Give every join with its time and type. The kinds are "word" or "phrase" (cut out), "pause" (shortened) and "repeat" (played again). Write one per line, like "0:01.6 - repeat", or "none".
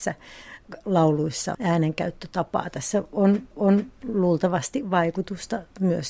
0:01.5 - phrase
0:03.5 - repeat